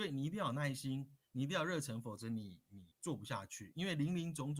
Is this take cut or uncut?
cut